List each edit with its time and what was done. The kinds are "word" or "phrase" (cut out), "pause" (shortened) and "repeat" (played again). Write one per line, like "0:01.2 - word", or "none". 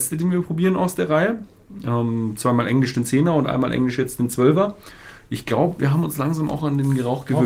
none